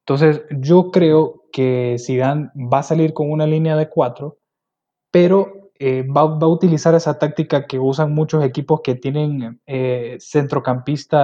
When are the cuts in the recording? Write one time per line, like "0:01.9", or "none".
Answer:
none